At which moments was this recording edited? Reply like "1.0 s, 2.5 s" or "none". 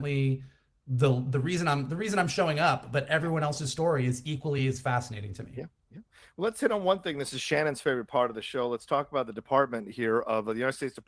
none